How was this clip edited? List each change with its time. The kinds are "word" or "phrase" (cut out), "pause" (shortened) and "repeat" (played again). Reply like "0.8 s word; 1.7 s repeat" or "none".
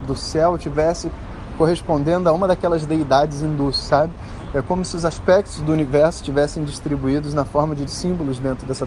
7.9 s word